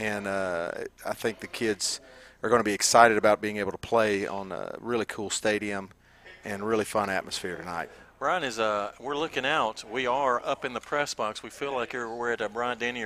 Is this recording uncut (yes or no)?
yes